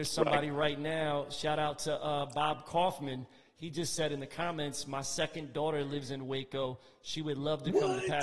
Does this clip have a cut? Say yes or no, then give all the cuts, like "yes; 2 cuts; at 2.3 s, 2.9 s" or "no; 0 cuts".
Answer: no; 0 cuts